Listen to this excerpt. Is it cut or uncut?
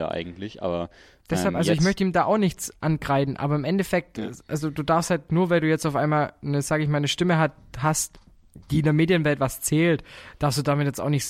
uncut